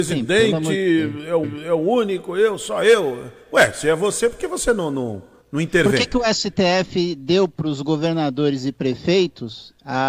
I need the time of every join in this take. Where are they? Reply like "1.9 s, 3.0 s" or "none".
1.4 s, 5.4 s